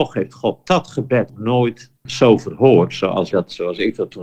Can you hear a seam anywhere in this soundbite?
yes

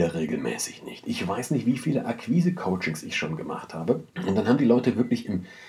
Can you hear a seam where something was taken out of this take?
no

